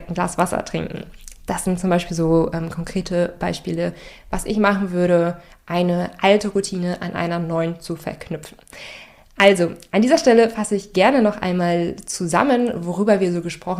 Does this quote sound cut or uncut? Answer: uncut